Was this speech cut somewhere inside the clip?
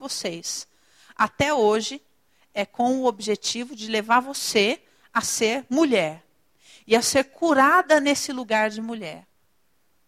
no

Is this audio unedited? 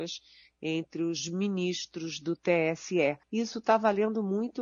no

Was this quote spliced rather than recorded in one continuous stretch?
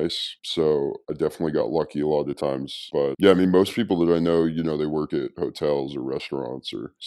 no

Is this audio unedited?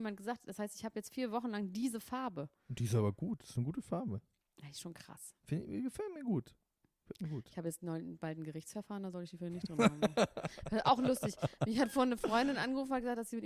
yes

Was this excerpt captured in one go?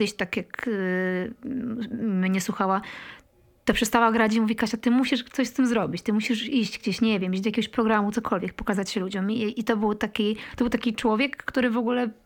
yes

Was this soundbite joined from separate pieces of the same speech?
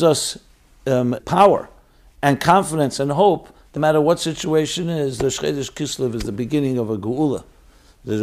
yes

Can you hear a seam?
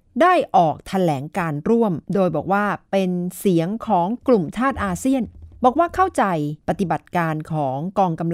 yes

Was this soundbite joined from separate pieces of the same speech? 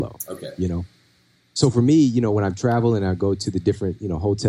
no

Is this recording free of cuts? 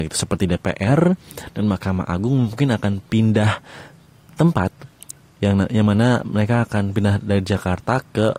yes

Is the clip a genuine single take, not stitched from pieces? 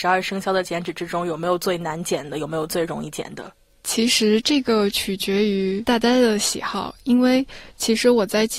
yes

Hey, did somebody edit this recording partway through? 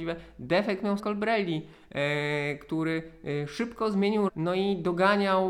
yes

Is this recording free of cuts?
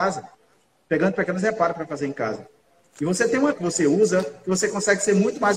no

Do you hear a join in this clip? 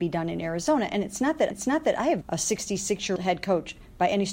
yes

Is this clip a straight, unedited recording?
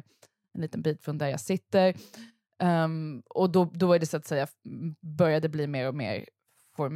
yes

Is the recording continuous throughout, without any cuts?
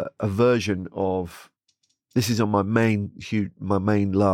yes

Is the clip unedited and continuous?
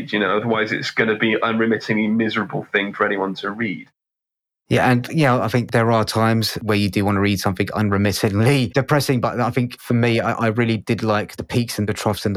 yes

